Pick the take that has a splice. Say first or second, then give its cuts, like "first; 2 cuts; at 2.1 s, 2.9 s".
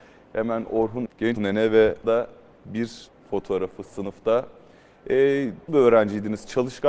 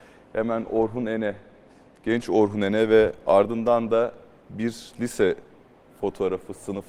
first; 5 cuts; at 1.1 s, 1.4 s, 2.0 s, 3.1 s, 5.7 s